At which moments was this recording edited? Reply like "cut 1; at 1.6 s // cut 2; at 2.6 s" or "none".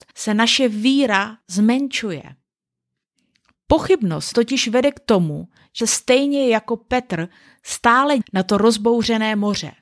cut 1; at 4.3 s // cut 2; at 5.8 s // cut 3; at 8.2 s